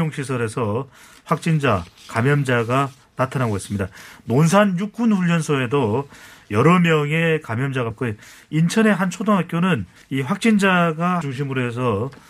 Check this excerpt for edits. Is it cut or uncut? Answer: cut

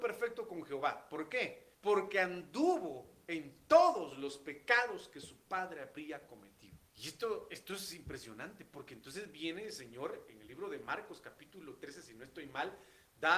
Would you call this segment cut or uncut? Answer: cut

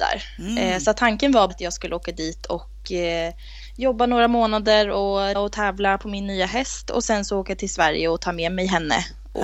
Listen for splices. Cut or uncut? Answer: cut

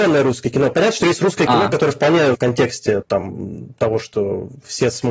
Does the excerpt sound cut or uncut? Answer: cut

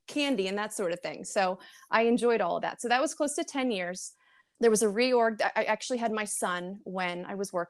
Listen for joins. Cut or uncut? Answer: cut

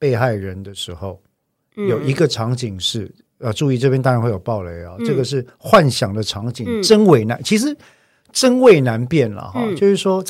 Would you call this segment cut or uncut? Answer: uncut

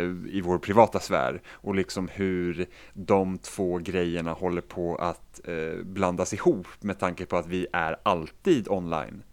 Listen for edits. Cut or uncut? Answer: uncut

